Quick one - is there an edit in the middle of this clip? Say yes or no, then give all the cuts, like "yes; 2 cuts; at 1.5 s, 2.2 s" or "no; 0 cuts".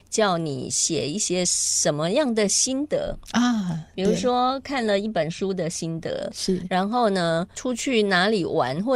yes; 1 cut; at 7.5 s